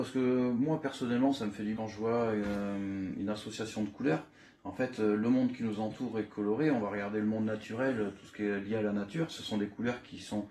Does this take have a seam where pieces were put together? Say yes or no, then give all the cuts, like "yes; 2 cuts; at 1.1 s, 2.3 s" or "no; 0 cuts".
yes; 1 cut; at 1.8 s